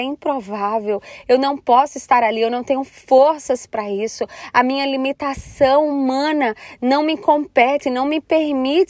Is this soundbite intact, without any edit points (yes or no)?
yes